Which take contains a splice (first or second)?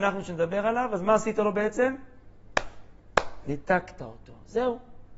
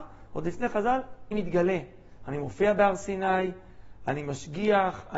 second